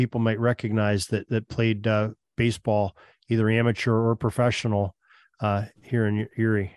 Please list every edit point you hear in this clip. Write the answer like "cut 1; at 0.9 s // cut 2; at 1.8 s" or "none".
none